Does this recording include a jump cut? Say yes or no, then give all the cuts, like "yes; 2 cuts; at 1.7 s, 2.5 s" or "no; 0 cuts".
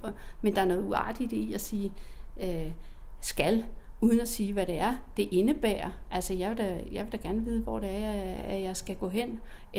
no; 0 cuts